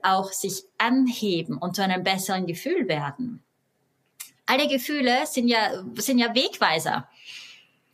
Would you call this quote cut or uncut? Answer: uncut